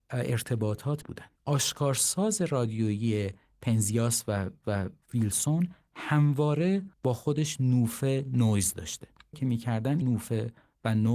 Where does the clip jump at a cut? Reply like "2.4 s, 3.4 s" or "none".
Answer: 1.0 s, 1.4 s, 4.6 s, 6.9 s, 9.3 s, 10.0 s

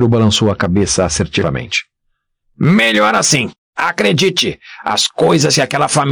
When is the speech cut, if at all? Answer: none

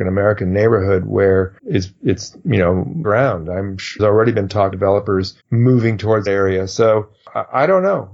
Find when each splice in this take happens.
1.6 s, 3.0 s, 4.0 s, 4.7 s, 5.4 s, 6.3 s

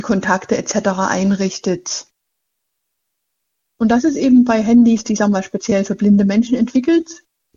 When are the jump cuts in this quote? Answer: none

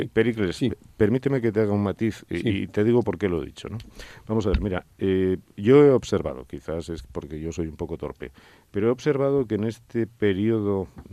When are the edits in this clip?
none

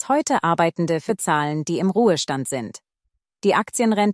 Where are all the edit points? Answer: 1.1 s

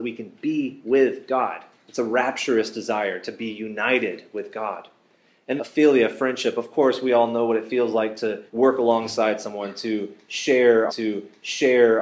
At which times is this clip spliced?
1.8 s, 5.6 s, 8.5 s, 10.9 s

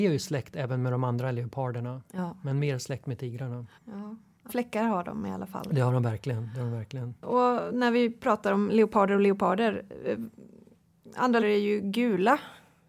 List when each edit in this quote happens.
3.7 s, 4.5 s, 7.2 s, 11.4 s

